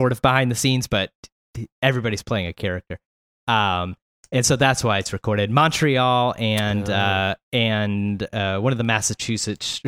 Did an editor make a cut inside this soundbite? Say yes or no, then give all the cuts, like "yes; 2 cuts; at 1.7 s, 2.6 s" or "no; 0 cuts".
no; 0 cuts